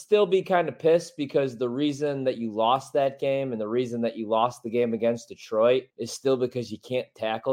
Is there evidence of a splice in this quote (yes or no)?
yes